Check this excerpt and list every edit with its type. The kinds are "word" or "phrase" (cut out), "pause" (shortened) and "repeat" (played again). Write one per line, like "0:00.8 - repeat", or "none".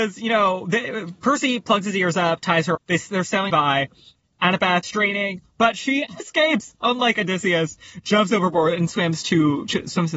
0:02.7 - word
0:03.5 - word
0:04.8 - word
0:06.2 - word